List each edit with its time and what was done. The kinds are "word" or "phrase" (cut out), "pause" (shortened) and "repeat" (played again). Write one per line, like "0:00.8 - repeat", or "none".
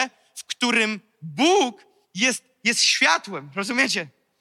0:02.0 - pause